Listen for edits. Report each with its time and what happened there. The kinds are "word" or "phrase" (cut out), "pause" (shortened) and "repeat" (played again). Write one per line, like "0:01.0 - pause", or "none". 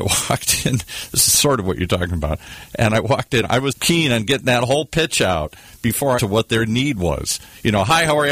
0:03.7 - word
0:06.2 - phrase

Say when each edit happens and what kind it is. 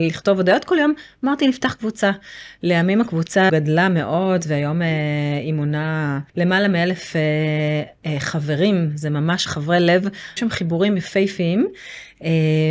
0:03.5 - word
0:06.3 - pause
0:09.5 - word
0:10.4 - word

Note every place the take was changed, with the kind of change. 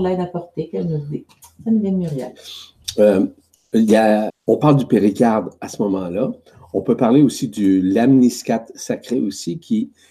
0:04.3 - word

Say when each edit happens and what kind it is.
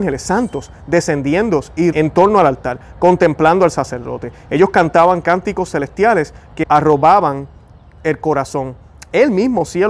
0:01.9 - word
0:06.6 - word

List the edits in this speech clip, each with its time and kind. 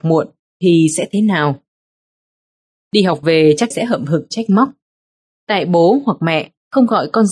0:03.7 - phrase

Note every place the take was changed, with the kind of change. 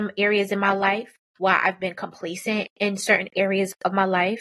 0:01.3 - pause

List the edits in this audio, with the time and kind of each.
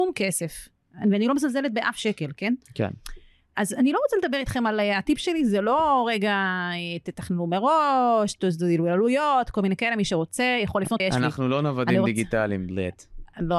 0:11.0 - word

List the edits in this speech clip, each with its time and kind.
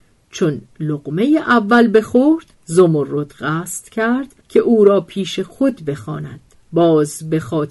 0:02.5 - pause
0:04.4 - pause
0:06.5 - pause

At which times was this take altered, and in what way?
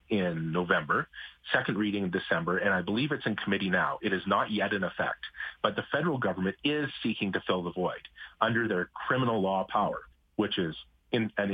0:10.1 - pause

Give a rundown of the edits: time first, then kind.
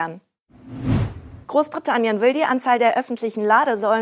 0:01.4 - pause

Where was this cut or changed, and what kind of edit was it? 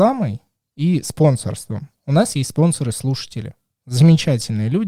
none

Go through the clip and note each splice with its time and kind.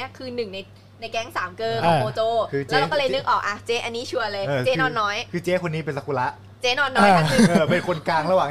0:06.6 - pause

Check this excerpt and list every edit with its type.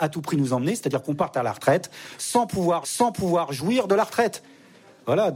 0:02.8 - repeat

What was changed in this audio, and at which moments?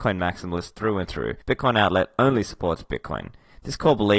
0:01.4 - pause

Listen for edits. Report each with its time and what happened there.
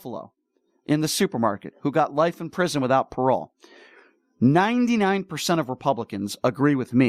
none

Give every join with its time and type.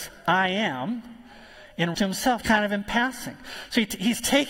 0:01.9 - word
0:02.4 - word

